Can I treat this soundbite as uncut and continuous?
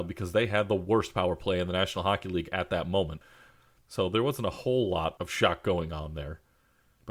yes; 0 cuts

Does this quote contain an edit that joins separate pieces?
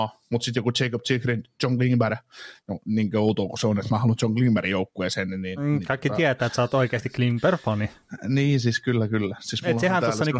no; 0 cuts

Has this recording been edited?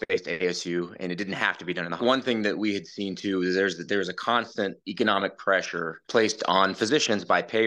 yes; 2 cuts; at 2.0 s, 4.8 s

